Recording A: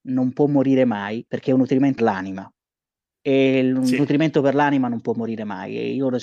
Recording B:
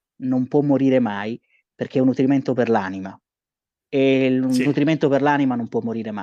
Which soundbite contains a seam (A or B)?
A